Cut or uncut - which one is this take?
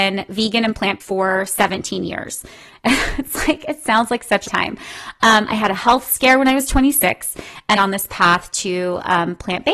cut